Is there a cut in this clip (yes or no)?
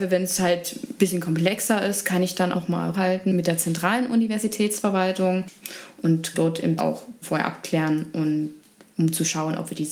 yes